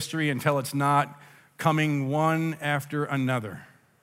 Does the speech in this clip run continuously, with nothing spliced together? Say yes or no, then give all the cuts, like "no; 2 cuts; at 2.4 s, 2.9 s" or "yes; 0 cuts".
yes; 0 cuts